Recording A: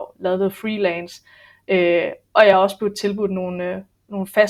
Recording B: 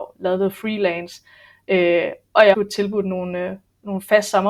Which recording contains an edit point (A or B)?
B